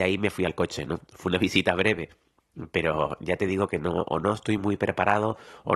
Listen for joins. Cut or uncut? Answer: uncut